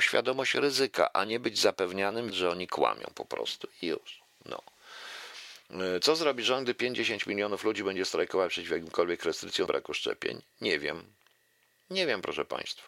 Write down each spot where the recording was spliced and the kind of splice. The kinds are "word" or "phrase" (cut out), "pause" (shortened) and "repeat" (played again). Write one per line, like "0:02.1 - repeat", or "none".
0:02.3 - word
0:09.7 - word